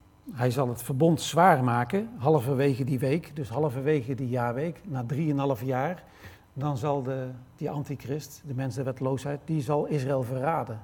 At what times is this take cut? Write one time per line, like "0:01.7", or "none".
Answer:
none